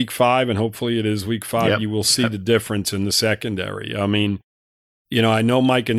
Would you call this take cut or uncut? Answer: uncut